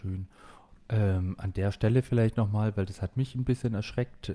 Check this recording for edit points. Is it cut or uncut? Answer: uncut